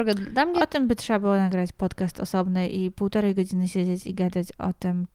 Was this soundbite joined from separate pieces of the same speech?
no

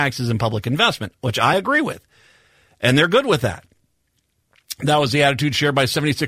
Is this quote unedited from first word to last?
yes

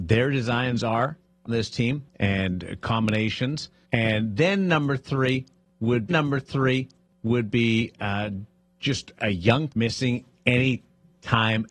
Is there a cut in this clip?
yes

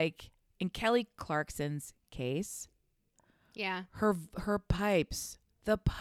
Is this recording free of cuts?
yes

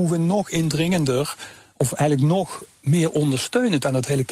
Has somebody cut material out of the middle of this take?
no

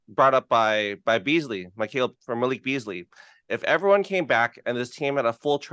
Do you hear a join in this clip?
yes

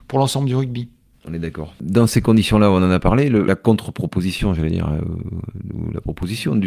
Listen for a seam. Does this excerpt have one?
yes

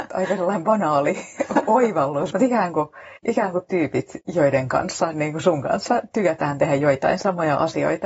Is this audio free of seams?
no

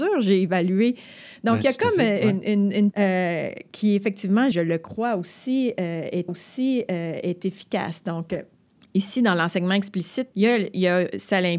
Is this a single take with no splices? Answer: no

